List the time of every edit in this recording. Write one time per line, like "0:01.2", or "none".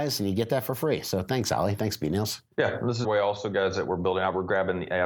0:02.5
0:03.0